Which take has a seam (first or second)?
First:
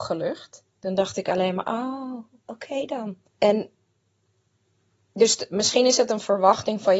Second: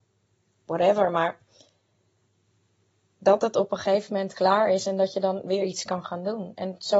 first